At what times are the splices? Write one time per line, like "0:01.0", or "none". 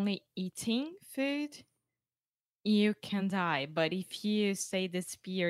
none